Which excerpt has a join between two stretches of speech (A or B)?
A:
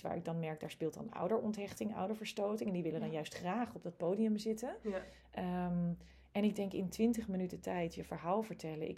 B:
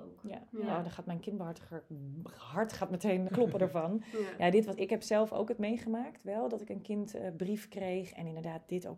B